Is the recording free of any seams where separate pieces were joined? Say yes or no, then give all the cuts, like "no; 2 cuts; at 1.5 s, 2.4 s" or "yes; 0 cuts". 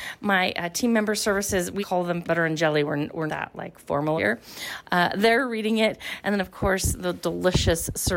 no; 4 cuts; at 1.8 s, 2.2 s, 3.3 s, 4.2 s